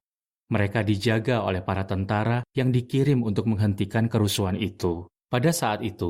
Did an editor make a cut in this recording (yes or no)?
yes